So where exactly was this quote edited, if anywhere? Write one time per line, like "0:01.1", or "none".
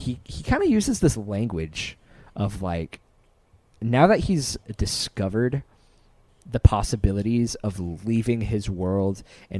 none